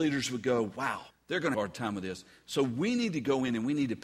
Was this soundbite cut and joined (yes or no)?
yes